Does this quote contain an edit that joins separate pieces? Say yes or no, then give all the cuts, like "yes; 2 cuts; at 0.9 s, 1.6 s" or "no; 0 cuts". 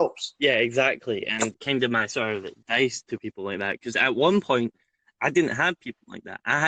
yes; 1 cut; at 1.5 s